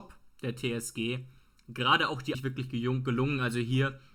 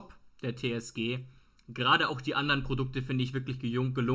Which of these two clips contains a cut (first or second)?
first